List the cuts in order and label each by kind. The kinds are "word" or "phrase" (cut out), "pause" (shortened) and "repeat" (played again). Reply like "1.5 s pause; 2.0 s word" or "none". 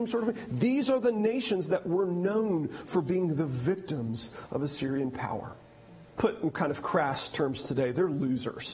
6.1 s pause